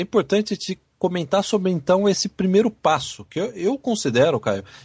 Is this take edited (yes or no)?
no